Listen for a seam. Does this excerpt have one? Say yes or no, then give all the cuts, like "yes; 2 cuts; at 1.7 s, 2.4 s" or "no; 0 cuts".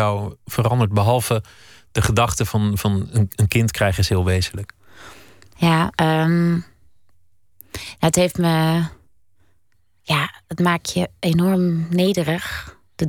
no; 0 cuts